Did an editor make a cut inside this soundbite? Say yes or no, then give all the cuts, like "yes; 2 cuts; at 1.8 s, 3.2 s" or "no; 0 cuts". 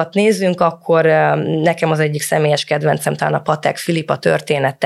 no; 0 cuts